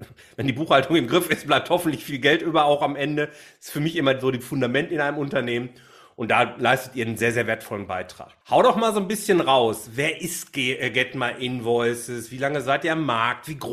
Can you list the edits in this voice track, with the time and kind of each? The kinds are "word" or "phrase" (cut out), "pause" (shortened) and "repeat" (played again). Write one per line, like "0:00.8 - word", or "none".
0:08.4 - pause